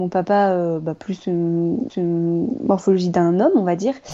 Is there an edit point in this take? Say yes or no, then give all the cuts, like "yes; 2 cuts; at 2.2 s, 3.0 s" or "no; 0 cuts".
yes; 1 cut; at 1.9 s